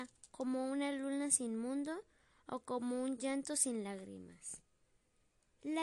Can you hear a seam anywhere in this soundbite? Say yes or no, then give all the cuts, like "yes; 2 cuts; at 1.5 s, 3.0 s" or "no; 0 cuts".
no; 0 cuts